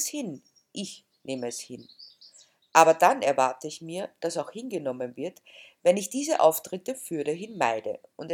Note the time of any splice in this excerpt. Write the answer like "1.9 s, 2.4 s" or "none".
none